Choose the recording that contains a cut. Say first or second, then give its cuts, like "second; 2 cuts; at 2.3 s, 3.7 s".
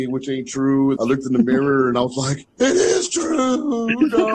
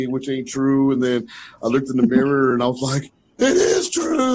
first; 2 cuts; at 1.0 s, 2.5 s